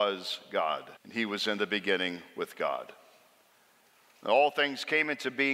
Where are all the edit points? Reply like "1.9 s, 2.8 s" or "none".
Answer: 1.0 s